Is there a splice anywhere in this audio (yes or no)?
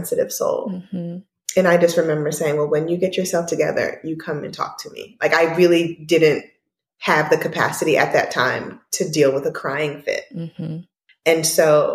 no